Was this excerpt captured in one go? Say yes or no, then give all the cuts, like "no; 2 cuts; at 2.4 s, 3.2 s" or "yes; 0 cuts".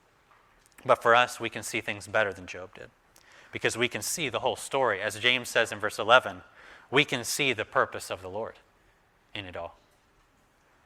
yes; 0 cuts